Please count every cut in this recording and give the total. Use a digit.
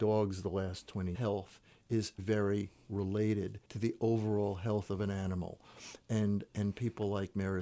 3